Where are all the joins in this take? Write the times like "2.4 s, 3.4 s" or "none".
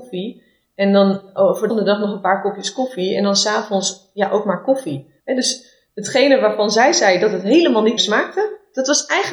1.7 s, 5.2 s, 8.0 s